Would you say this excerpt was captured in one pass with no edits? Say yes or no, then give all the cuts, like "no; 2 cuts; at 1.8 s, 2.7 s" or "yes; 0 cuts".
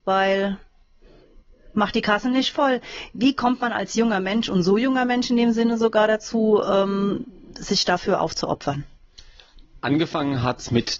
yes; 0 cuts